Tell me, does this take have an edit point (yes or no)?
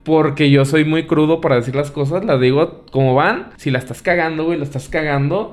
yes